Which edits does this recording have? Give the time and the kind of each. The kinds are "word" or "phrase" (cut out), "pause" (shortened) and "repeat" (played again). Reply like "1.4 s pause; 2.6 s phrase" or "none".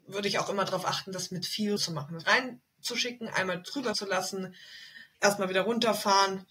1.8 s word; 2.2 s word; 3.9 s word; 5.1 s pause